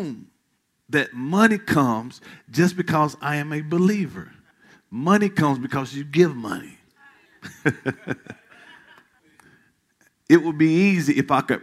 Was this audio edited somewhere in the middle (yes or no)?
no